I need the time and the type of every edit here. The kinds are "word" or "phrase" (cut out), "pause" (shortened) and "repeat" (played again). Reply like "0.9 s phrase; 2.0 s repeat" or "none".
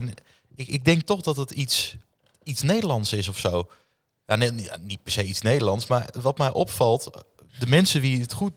none